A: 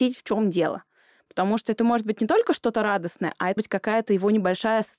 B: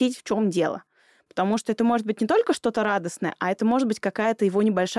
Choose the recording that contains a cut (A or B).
A